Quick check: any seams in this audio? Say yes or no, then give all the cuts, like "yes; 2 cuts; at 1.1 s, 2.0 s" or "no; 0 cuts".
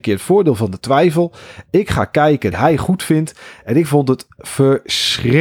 yes; 1 cut; at 2.5 s